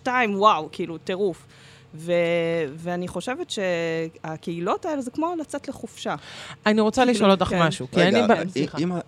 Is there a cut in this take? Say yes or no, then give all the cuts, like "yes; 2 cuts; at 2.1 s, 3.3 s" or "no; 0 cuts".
no; 0 cuts